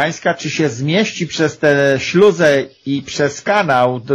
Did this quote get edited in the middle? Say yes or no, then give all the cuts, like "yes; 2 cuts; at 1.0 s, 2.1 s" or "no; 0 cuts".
no; 0 cuts